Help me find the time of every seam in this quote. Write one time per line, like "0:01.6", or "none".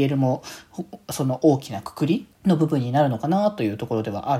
0:02.3